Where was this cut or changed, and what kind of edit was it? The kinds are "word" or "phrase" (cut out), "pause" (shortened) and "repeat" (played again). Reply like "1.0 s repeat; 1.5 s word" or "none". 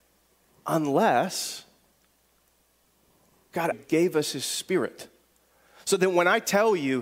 3.7 s word